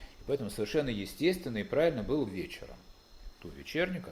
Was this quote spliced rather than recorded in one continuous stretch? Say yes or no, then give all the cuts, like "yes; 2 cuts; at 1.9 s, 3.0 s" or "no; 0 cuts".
yes; 1 cut; at 2.3 s